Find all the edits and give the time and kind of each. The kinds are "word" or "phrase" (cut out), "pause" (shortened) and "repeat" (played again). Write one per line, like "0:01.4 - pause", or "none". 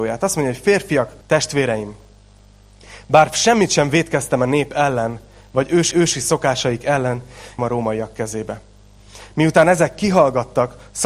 0:01.2 - pause
0:05.9 - repeat
0:07.6 - phrase